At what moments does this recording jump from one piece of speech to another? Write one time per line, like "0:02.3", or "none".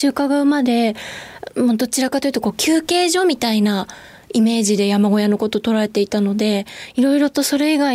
none

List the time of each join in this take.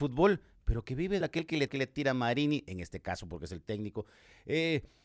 0:01.2
0:01.7

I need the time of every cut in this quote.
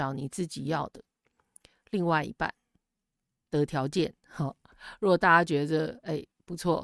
none

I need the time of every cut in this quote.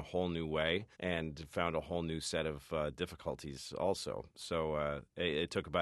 0:00.9

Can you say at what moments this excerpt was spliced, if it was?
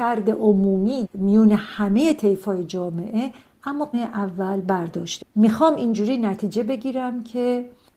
0:01.0
0:03.9
0:05.2

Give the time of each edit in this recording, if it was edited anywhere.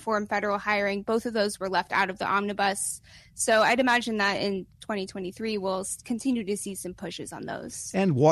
none

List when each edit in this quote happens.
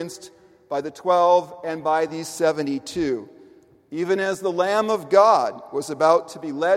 none

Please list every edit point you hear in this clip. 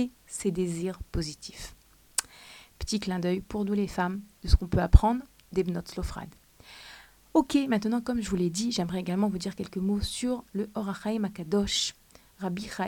none

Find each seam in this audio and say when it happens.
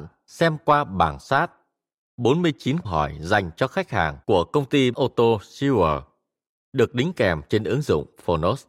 0:01.2
0:02.8
0:04.2
0:04.9

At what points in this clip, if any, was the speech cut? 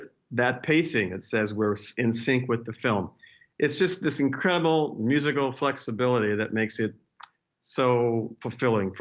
none

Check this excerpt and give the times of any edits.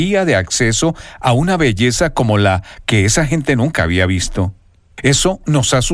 none

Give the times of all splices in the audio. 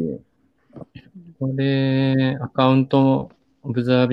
0:01.3

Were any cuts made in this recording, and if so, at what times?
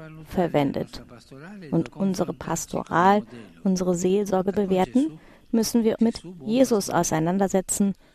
0:01.9
0:04.5
0:06.0

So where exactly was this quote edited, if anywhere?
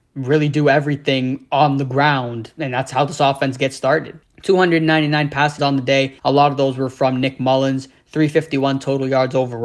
0:04.2
0:05.6
0:06.2

